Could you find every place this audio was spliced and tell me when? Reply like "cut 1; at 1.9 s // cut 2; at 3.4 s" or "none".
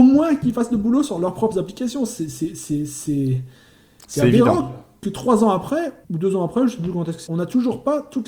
cut 1; at 6.0 s // cut 2; at 7.3 s